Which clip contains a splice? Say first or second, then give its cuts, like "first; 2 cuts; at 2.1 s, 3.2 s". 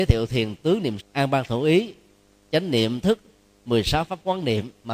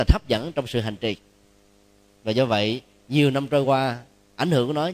first; 2 cuts; at 1.0 s, 3.0 s